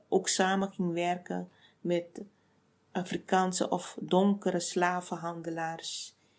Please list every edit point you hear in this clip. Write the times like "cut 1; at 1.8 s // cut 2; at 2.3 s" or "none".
none